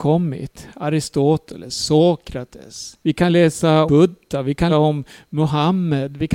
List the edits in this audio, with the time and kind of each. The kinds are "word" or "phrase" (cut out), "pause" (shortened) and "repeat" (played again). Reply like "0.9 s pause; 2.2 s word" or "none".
3.0 s pause; 3.9 s word; 4.7 s word